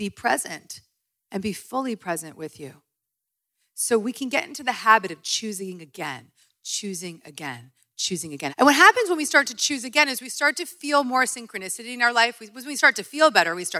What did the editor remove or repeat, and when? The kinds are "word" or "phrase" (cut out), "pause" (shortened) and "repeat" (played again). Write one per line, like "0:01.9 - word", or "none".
none